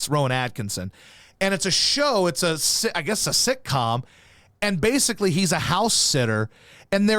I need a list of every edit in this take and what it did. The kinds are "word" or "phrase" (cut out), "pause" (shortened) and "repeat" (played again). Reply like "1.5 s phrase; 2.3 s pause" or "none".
none